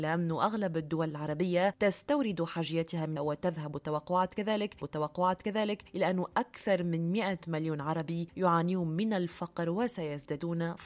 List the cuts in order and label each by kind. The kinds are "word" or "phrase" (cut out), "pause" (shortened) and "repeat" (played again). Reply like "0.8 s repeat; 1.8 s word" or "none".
3.2 s phrase; 4.8 s repeat